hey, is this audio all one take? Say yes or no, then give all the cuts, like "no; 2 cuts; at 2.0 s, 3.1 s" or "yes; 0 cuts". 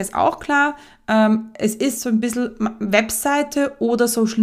yes; 0 cuts